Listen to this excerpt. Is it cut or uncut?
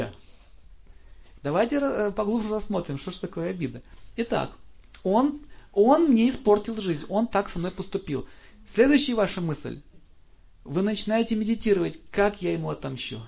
uncut